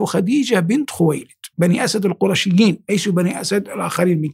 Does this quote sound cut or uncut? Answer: cut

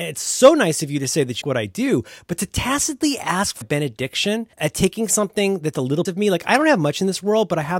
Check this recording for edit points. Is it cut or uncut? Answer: cut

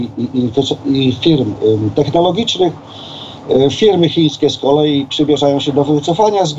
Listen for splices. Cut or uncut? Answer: uncut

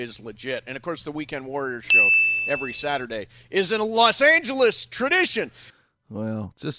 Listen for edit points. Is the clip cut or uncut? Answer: uncut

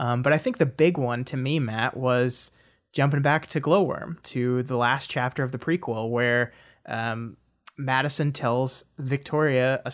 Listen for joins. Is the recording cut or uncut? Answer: uncut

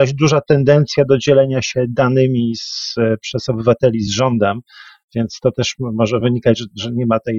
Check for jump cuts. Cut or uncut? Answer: uncut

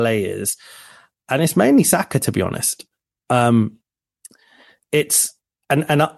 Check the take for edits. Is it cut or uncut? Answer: uncut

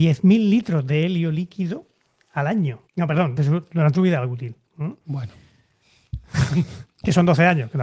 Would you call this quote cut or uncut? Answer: cut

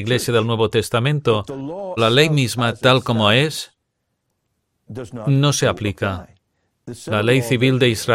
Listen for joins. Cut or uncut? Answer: cut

